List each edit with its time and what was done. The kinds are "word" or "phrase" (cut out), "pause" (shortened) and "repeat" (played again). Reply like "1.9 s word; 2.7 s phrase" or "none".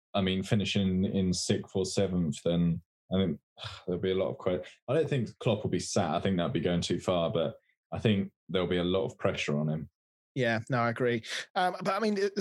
none